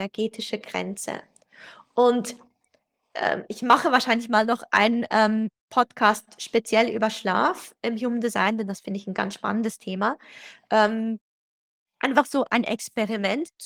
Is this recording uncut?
yes; 0 cuts

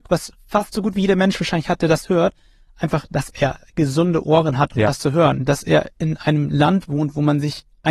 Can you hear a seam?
no; 0 cuts

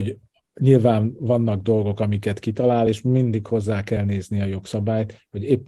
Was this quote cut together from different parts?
no; 0 cuts

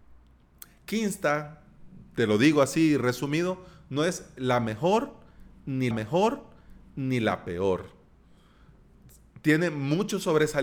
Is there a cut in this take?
yes; 1 cut; at 5.9 s

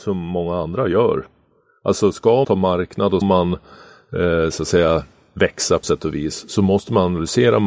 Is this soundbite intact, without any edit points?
no; 3 cuts; at 2.4 s, 3.2 s, 5.8 s

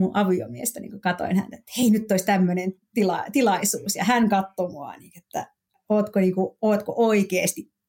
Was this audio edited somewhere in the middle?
no; 0 cuts

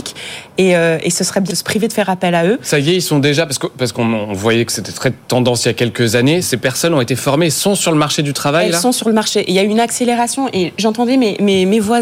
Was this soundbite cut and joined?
yes; 2 cuts; at 1.5 s, 6.4 s

